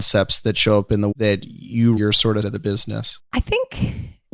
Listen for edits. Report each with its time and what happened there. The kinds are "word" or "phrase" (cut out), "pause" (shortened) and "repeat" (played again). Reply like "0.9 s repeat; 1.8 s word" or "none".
1.1 s word; 2.0 s word; 2.4 s word; 3.2 s pause